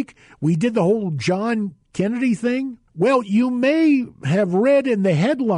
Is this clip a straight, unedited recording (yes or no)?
no